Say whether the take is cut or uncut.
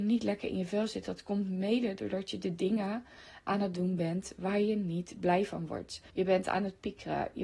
cut